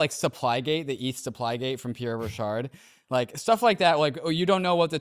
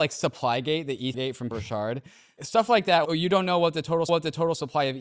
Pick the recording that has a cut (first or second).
second